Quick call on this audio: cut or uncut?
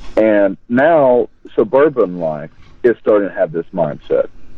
uncut